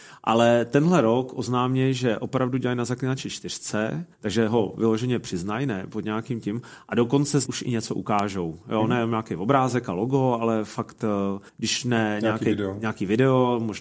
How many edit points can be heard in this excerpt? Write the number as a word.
three